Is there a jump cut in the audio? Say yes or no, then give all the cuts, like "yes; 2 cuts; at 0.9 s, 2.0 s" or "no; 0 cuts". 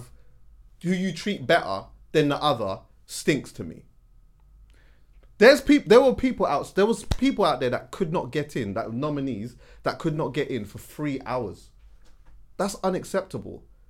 no; 0 cuts